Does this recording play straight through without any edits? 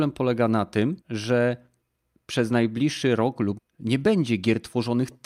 no; 2 cuts; at 1.0 s, 3.6 s

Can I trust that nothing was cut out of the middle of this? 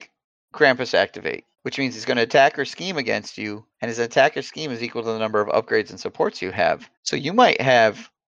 no; 3 cuts; at 1.5 s, 3.7 s, 6.9 s

